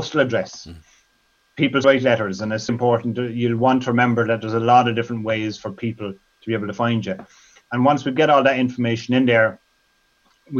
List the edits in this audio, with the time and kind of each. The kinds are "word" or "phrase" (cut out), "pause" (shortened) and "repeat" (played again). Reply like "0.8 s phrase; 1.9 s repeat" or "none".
1.8 s word; 2.7 s word